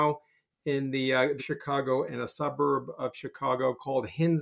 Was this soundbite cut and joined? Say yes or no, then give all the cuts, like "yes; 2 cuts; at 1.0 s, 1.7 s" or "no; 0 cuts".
yes; 2 cuts; at 1.4 s, 2.1 s